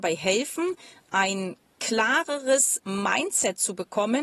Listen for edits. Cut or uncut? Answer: uncut